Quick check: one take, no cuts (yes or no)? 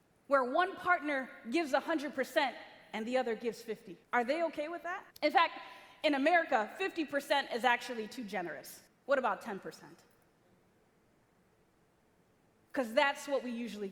no